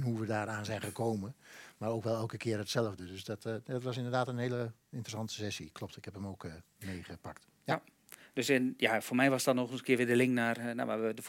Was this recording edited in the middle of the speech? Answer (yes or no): yes